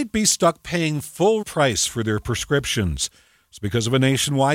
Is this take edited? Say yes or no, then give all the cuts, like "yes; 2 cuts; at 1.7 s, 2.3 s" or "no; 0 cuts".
yes; 1 cut; at 1.4 s